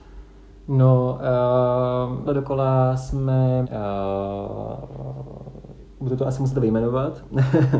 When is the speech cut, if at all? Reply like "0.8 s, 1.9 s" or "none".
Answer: 2.3 s, 3.6 s